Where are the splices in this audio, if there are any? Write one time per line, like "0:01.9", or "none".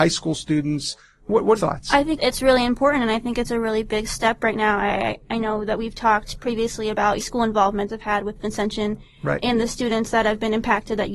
0:01.6
0:02.2
0:07.2
0:07.9